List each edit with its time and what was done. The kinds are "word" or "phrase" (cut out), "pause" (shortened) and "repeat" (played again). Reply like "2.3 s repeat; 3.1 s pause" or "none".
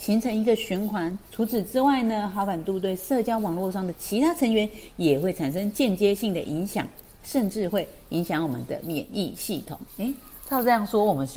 1.3 s pause; 9.9 s pause